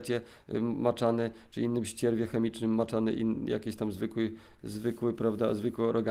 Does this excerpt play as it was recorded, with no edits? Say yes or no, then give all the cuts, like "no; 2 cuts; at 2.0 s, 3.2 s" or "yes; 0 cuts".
yes; 0 cuts